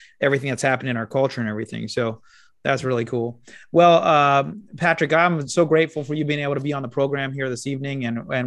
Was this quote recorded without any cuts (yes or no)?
yes